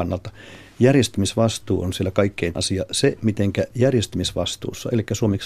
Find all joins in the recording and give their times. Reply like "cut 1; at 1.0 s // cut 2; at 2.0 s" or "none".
cut 1; at 2.5 s